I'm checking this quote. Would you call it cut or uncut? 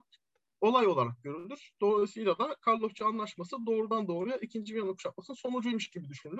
uncut